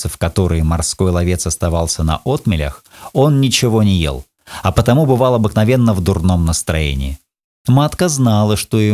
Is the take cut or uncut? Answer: uncut